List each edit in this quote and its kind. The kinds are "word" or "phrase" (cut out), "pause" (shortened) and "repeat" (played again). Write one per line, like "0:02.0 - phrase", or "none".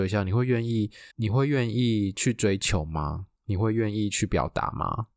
0:01.1 - pause
0:03.4 - pause